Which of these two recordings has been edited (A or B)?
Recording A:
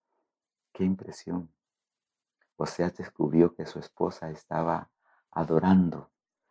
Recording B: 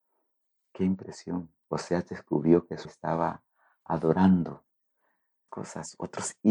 B